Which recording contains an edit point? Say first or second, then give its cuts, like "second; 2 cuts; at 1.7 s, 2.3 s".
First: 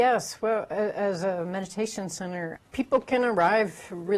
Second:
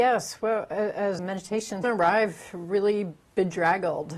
second; 2 cuts; at 1.2 s, 1.8 s